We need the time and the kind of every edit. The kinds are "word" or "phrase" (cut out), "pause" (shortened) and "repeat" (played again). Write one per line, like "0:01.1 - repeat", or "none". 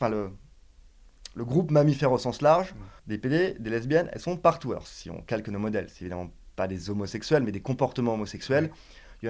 0:03.0 - pause